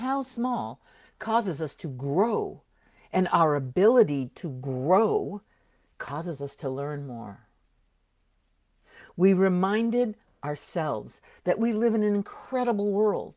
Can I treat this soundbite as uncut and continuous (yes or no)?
yes